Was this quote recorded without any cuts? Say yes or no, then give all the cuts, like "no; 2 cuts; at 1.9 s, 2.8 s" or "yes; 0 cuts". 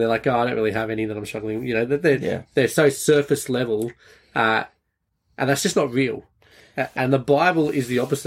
yes; 0 cuts